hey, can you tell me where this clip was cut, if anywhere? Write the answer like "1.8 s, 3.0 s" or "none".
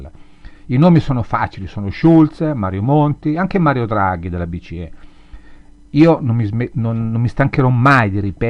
none